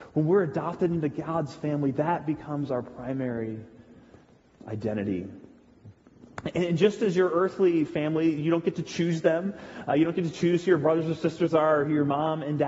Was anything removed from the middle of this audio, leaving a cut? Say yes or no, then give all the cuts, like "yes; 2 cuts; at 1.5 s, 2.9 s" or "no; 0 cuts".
no; 0 cuts